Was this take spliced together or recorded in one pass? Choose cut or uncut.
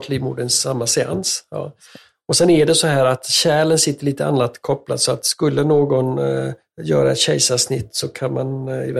uncut